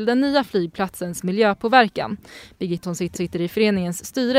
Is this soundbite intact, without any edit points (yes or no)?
no